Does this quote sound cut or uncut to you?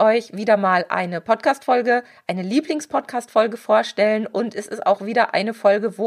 uncut